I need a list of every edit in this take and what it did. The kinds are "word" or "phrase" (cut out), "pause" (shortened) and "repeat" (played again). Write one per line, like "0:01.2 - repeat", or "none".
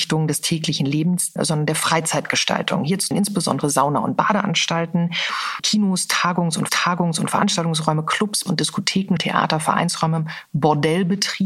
0:01.4 - word
0:03.1 - word
0:06.7 - repeat
0:08.5 - word
0:09.2 - word